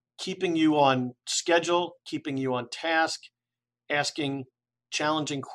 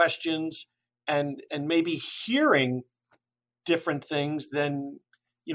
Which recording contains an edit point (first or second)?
first